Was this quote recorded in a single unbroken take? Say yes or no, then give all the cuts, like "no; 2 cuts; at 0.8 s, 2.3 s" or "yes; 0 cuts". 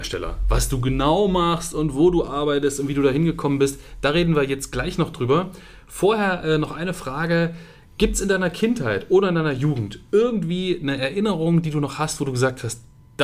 yes; 0 cuts